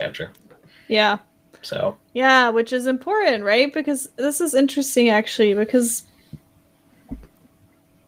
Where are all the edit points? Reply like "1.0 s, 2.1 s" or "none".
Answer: none